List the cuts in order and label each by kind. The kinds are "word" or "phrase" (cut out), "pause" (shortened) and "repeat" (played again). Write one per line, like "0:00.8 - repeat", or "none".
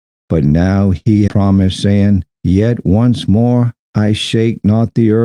0:01.3 - word
0:02.3 - pause